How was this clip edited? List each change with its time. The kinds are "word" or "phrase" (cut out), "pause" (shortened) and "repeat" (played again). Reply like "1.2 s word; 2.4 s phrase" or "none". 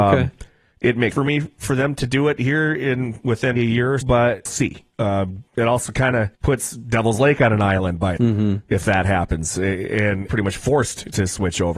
1.1 s word; 3.6 s word; 4.0 s word; 4.5 s phrase; 5.5 s pause; 6.3 s pause; 8.2 s word; 10.3 s phrase